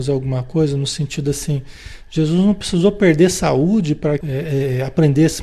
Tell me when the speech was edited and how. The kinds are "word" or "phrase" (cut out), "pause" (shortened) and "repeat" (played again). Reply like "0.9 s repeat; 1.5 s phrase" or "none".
4.2 s phrase